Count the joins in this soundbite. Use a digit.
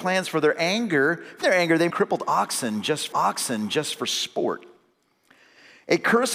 3